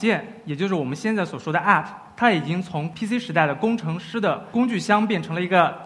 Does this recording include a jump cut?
no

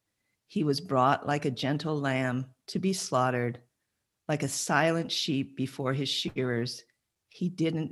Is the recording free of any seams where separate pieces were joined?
yes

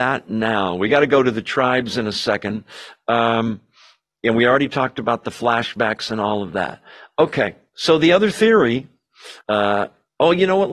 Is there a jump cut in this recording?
yes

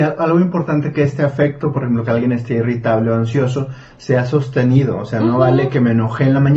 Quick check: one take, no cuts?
yes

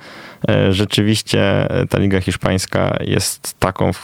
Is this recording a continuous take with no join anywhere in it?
yes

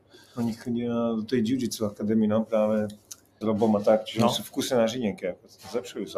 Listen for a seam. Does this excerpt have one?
yes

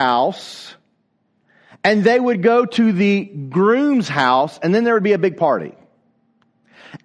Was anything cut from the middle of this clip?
no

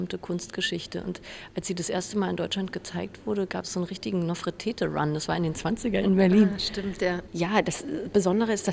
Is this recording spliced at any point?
yes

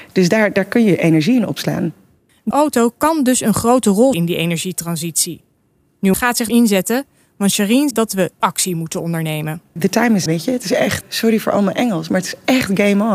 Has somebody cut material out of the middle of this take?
yes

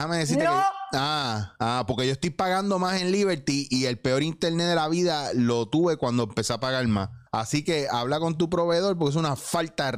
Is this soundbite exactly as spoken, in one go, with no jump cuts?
no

